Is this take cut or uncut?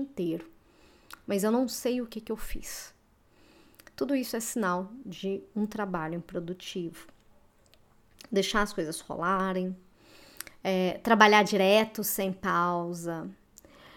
uncut